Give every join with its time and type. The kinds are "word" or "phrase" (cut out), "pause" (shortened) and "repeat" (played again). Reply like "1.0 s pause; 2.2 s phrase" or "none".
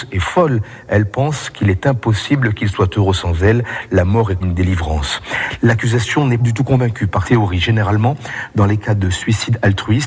4.4 s word; 6.4 s word; 7.2 s word